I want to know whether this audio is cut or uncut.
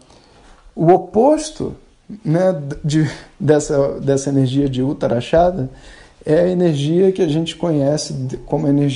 uncut